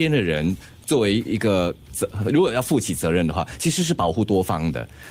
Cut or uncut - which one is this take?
cut